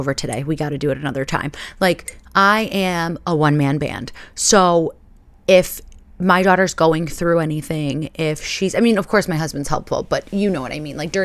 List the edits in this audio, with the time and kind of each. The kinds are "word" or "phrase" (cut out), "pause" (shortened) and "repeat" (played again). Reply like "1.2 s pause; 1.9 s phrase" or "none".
none